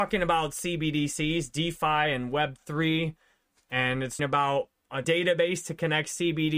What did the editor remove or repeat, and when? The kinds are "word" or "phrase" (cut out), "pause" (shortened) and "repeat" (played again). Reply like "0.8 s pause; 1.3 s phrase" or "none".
4.2 s word; 5.0 s word